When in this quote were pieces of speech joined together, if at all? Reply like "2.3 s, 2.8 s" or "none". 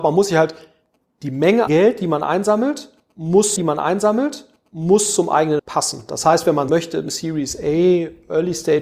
1.7 s, 3.6 s, 5.6 s, 6.7 s